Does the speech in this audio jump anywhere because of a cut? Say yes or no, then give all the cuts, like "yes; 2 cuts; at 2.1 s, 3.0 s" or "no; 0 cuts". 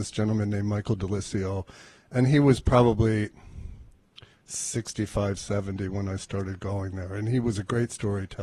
no; 0 cuts